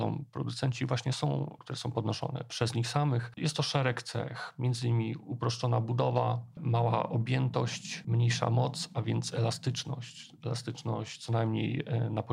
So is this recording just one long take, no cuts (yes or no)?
no